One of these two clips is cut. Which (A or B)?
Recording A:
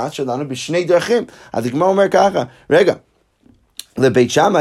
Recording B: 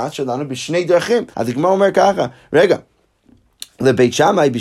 B